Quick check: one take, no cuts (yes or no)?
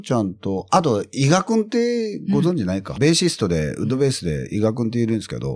no